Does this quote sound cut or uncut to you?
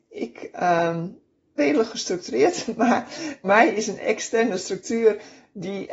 cut